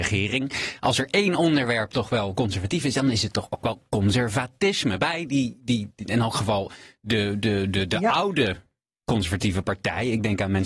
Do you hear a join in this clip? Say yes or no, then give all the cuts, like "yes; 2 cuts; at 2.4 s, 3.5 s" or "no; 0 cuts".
no; 0 cuts